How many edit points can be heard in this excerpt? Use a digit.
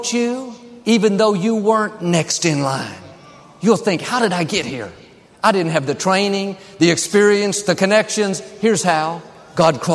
0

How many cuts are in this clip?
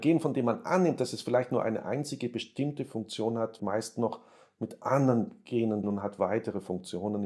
2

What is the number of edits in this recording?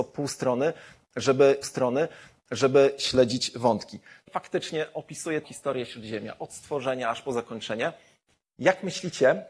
3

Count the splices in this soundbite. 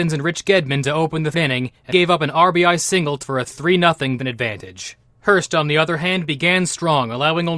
4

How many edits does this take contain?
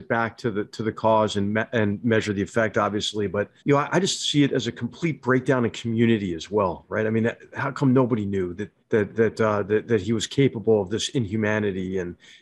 2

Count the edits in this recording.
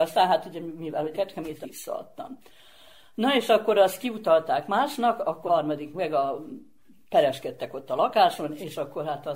4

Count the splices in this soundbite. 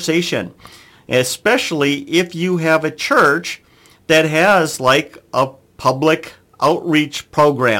0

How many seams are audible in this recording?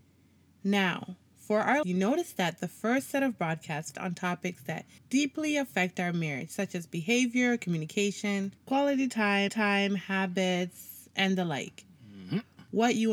5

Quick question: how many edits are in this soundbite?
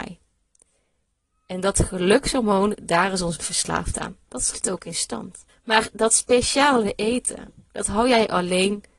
3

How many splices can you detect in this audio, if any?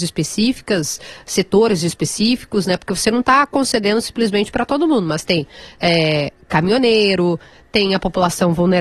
0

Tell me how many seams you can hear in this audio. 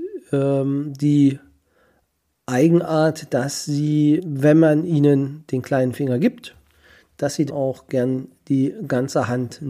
2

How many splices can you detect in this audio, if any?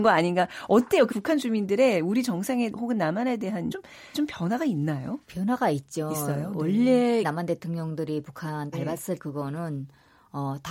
7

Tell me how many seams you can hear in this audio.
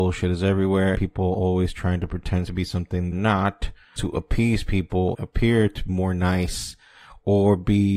6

